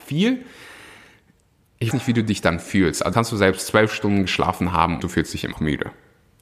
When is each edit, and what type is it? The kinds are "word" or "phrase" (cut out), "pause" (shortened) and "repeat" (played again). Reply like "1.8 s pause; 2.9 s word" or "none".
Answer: 1.9 s word; 3.1 s word; 5.0 s word; 5.5 s word